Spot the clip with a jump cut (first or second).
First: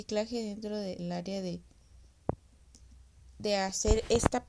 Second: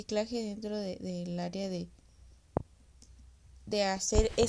first